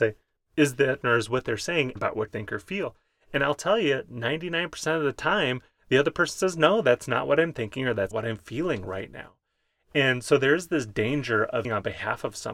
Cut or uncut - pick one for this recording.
cut